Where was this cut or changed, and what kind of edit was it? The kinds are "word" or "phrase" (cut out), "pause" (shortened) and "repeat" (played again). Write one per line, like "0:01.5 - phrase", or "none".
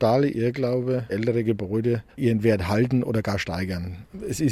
0:01.1 - phrase
0:02.1 - pause
0:03.1 - word